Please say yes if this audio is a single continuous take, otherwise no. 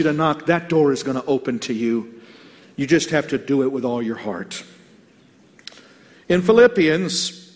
yes